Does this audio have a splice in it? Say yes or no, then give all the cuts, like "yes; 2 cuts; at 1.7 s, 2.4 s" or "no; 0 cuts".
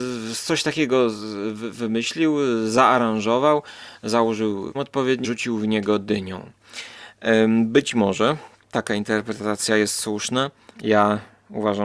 yes; 3 cuts; at 4.7 s, 5.2 s, 10.7 s